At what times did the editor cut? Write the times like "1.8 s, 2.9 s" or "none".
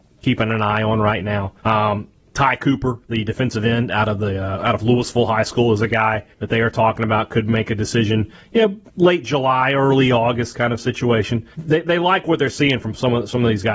1.6 s, 6.3 s, 8.9 s, 11.5 s